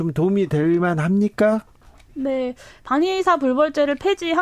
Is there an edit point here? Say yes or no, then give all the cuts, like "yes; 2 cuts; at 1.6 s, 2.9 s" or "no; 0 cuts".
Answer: no; 0 cuts